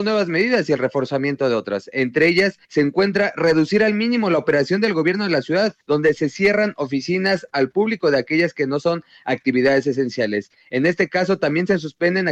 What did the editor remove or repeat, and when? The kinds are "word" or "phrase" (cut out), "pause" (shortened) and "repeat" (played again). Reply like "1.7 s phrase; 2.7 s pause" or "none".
2.6 s pause; 5.8 s pause